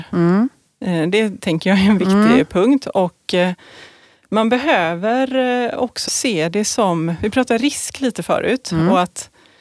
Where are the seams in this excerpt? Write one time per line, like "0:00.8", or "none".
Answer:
0:06.1